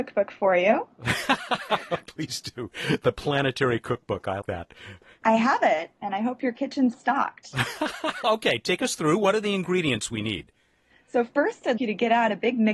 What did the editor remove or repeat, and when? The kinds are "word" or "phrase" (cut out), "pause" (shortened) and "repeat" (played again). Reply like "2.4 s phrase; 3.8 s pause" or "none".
4.4 s word; 6.9 s word; 11.8 s word

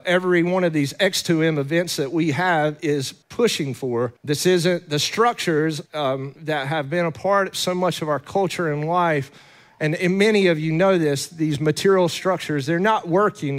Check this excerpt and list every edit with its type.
3.2 s pause; 4.2 s pause; 5.9 s pause

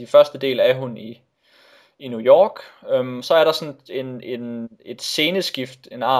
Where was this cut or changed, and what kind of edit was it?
none

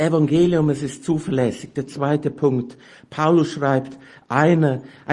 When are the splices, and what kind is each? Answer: none

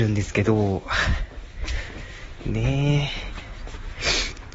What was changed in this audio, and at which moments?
none

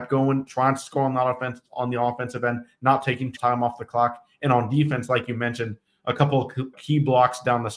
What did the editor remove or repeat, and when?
3.4 s word; 6.7 s word

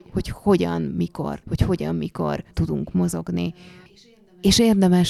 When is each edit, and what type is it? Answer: 1.4 s word; 2.5 s pause

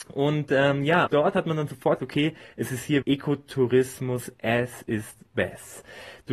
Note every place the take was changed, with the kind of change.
1.1 s word; 2.0 s word; 3.0 s word

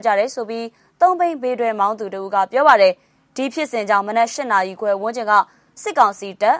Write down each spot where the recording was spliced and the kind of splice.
none

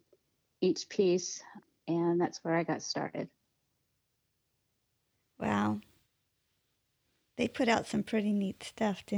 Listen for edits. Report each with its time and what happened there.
none

